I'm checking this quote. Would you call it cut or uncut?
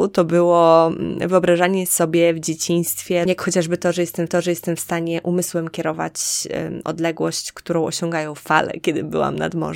cut